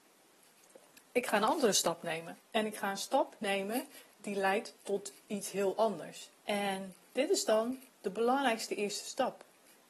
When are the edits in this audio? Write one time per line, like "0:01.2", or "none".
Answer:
0:02.4
0:06.4
0:07.9